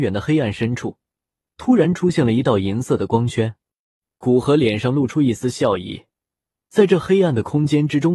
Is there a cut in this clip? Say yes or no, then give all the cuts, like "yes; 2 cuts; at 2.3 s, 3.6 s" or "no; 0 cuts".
no; 0 cuts